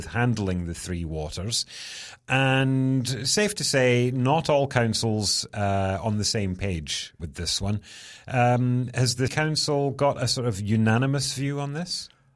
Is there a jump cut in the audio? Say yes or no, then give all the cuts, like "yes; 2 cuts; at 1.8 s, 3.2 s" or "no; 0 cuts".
yes; 2 cuts; at 7.2 s, 9.3 s